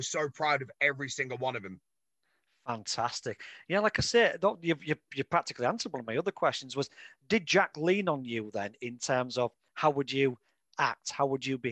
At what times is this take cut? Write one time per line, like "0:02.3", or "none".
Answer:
none